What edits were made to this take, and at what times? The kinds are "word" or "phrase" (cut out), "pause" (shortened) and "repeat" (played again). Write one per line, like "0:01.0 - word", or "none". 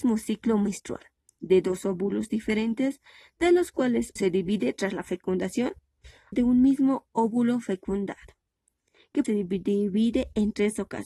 0:04.2 - word
0:06.3 - word
0:09.2 - word